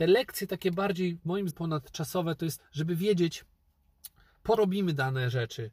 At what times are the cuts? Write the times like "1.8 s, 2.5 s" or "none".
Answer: 1.5 s, 2.6 s, 4.6 s